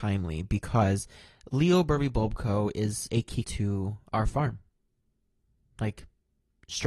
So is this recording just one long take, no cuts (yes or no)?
no